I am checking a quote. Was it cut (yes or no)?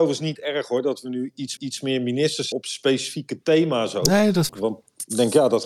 yes